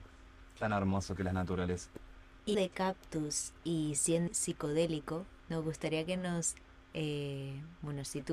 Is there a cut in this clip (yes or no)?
yes